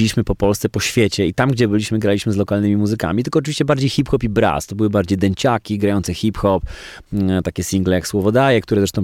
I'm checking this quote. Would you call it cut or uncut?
uncut